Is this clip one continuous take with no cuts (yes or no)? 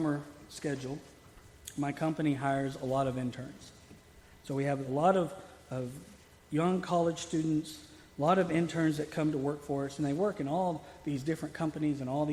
yes